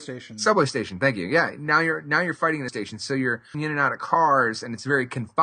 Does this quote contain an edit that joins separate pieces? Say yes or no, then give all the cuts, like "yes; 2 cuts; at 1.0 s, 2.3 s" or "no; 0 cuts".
yes; 2 cuts; at 2.7 s, 3.5 s